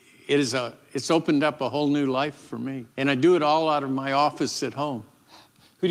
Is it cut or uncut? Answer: cut